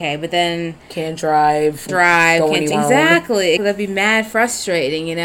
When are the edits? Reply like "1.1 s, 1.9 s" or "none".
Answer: 1.9 s, 2.7 s, 3.6 s